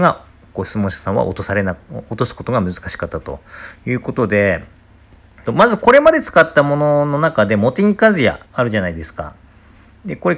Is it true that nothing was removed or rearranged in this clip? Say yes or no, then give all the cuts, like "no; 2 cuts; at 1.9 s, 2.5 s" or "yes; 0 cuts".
no; 2 cuts; at 5.4 s, 8.4 s